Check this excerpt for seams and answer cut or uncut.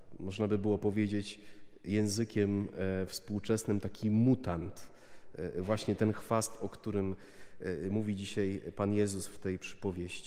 uncut